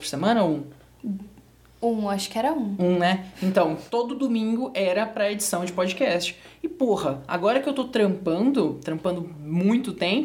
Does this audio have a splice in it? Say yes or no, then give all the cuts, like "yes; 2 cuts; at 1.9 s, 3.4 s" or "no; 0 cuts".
no; 0 cuts